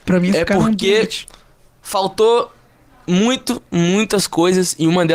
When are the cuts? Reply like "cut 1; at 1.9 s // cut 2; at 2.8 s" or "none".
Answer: cut 1; at 3.7 s